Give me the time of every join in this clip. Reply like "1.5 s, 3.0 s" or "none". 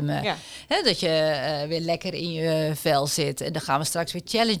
none